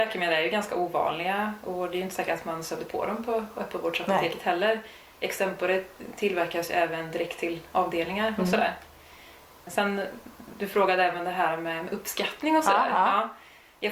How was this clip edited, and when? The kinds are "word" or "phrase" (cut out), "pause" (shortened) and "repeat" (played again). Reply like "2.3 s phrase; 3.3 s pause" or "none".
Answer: none